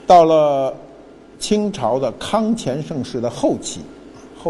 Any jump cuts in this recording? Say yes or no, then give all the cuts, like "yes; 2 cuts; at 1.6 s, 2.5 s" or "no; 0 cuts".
no; 0 cuts